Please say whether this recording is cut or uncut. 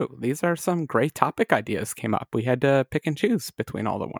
uncut